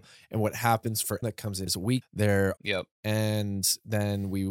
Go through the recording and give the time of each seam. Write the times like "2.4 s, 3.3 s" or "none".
1.2 s, 1.7 s, 2.0 s, 2.6 s

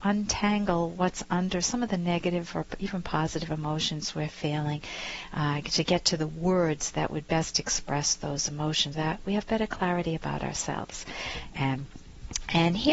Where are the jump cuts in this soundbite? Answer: 8.9 s

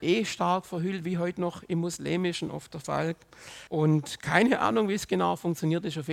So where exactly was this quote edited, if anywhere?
3.7 s

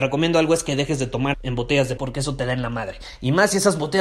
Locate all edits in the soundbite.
1.3 s, 2.0 s

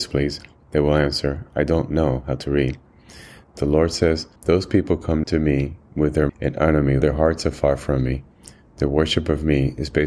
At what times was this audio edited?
4.4 s, 5.2 s, 6.3 s, 7.0 s

